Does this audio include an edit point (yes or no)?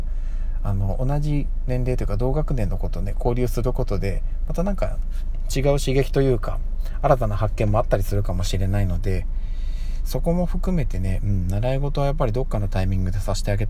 no